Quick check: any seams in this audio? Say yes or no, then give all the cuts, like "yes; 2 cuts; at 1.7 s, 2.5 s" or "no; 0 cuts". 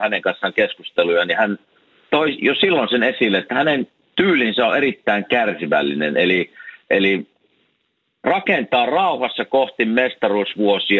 no; 0 cuts